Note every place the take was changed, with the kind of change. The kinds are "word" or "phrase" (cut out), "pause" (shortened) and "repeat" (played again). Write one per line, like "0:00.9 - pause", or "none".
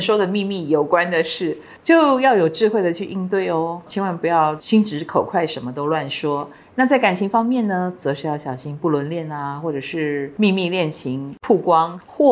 none